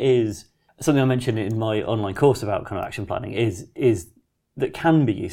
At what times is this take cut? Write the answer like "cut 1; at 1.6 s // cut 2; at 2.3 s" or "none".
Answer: none